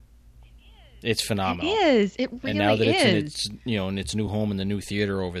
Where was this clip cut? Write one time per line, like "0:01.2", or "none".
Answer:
none